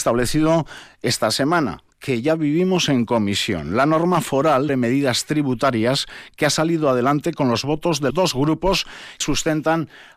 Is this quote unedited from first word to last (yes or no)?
no